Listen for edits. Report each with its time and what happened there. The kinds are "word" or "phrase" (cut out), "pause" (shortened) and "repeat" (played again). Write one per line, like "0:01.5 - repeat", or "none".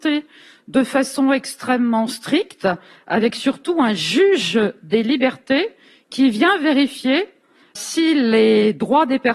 0:07.8 - word